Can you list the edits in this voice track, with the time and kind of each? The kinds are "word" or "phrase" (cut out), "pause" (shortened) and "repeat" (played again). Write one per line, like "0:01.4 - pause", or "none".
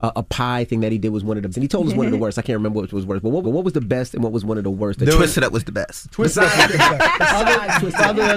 0:01.5 - word
0:03.4 - repeat